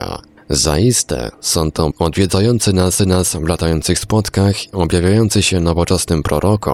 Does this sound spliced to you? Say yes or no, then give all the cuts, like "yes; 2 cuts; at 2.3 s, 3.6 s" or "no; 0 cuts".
yes; 3 cuts; at 1.9 s, 3.0 s, 4.7 s